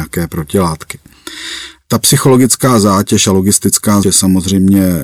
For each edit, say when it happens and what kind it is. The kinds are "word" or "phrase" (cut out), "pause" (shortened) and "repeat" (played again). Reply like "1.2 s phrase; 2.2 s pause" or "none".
4.0 s word